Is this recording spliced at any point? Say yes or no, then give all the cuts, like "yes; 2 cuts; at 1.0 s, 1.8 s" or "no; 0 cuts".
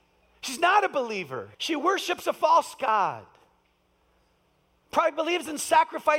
yes; 1 cut; at 1.5 s